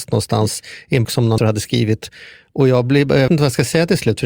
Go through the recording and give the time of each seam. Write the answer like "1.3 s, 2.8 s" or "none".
1.0 s, 1.4 s, 3.3 s